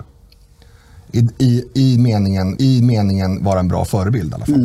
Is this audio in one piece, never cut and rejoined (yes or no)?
no